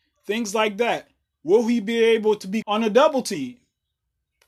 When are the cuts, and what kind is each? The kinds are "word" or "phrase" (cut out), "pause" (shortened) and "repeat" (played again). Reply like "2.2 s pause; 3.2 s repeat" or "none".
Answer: 2.6 s word